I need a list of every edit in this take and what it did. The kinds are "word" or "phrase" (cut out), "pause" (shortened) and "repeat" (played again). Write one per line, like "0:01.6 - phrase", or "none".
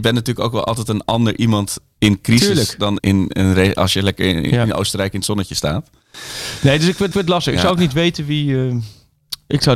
0:03.0 - word
0:07.1 - repeat